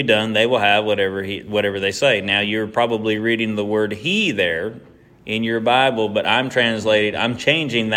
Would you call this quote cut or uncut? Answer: uncut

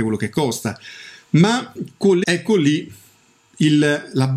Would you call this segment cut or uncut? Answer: cut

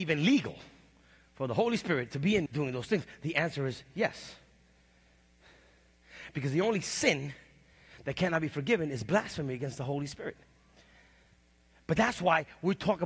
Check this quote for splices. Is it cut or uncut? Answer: cut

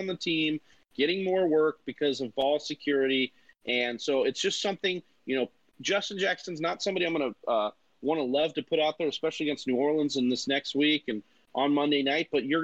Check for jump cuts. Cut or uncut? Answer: uncut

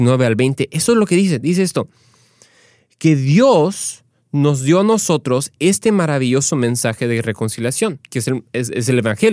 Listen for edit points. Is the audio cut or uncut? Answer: cut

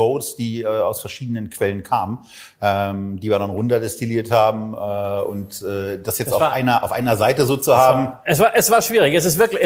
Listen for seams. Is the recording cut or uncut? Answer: uncut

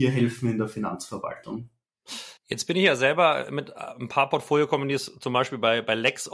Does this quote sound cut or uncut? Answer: cut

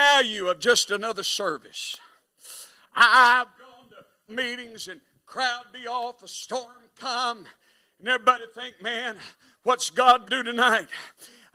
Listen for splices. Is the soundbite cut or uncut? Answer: cut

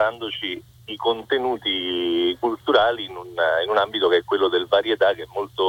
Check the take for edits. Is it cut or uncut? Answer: uncut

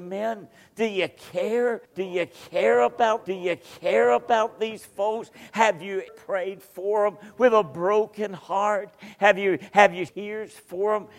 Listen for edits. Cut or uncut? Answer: cut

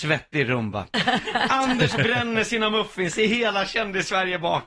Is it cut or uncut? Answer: uncut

